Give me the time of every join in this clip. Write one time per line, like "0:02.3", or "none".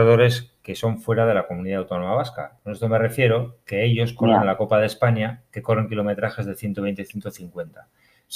none